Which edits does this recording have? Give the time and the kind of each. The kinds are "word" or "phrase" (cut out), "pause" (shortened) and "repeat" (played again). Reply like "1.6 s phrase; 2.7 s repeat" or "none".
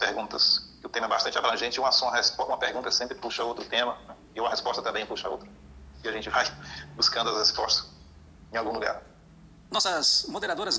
none